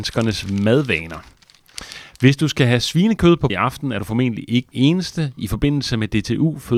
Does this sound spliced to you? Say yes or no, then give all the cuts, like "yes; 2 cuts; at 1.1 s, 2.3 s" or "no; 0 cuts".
yes; 2 cuts; at 3.5 s, 4.7 s